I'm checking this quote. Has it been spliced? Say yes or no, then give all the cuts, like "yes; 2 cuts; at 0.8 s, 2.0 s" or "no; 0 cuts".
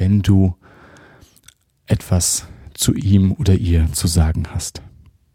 no; 0 cuts